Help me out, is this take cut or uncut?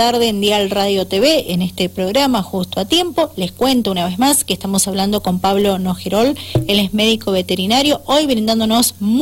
uncut